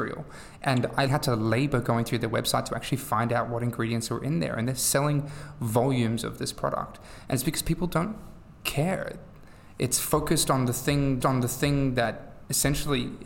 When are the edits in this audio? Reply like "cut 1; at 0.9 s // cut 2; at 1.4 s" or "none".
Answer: cut 1; at 1.1 s // cut 2; at 11.2 s